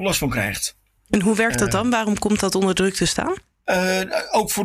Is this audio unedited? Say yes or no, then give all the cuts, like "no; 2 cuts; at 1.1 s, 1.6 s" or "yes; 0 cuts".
yes; 0 cuts